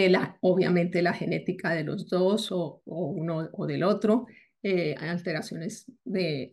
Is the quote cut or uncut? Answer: uncut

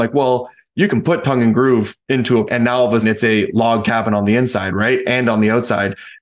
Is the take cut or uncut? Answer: cut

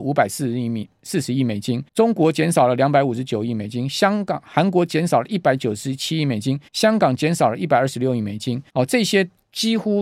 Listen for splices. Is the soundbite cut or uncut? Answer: cut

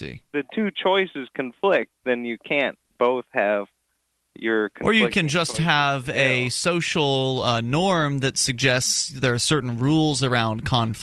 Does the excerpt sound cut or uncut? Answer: uncut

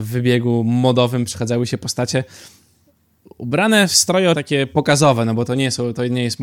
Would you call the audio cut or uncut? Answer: cut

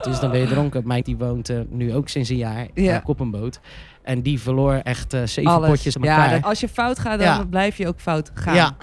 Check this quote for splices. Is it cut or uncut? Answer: cut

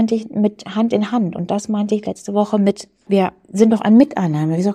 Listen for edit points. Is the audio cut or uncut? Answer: uncut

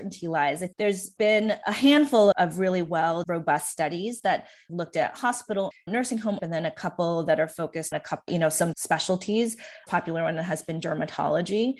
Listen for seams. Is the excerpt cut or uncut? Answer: cut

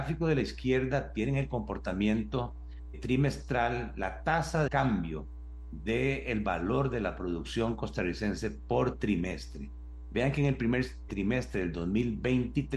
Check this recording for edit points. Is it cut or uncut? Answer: cut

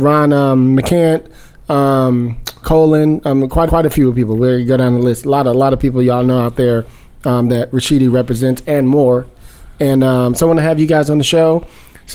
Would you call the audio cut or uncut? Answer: cut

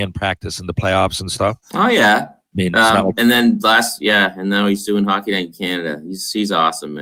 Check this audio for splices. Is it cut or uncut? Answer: uncut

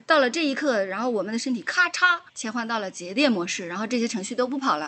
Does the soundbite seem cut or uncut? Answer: cut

